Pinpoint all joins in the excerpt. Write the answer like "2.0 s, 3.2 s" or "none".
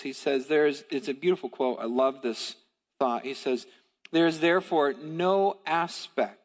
none